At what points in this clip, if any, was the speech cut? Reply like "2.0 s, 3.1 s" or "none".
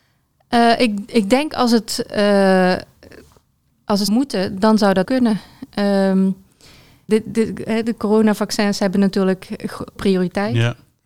4.1 s, 5.0 s, 7.1 s, 10.0 s